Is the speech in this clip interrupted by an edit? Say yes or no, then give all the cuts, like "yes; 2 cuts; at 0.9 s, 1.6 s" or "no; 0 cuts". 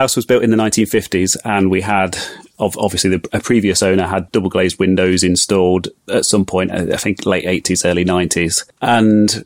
yes; 1 cut; at 4.3 s